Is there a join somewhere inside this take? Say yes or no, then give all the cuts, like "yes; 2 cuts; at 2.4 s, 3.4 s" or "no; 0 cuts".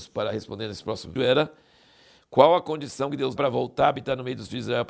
yes; 2 cuts; at 1.2 s, 3.4 s